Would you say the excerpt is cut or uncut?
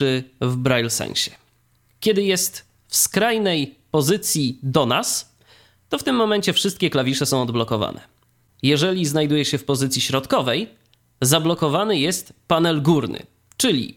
uncut